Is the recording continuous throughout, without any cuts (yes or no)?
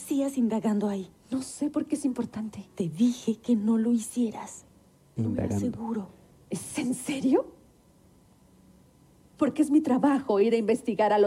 yes